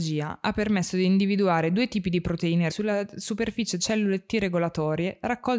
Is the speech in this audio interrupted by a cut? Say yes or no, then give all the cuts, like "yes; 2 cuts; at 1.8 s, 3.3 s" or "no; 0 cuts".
yes; 2 cuts; at 2.7 s, 3.8 s